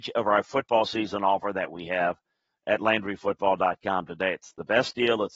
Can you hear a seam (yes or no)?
no